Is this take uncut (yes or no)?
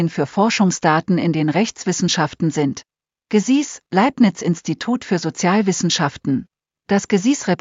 yes